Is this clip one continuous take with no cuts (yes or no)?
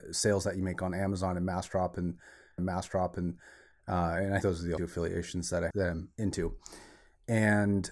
no